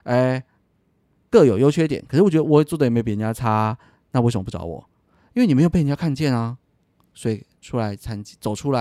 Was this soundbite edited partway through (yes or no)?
no